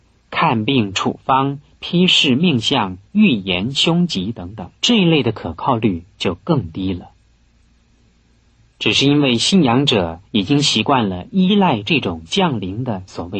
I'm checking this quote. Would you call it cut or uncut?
cut